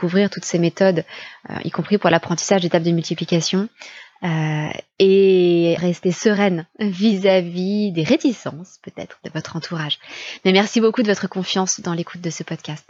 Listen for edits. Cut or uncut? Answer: cut